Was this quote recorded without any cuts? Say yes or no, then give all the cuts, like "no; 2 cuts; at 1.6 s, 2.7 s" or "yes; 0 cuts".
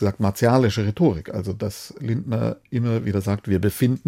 yes; 0 cuts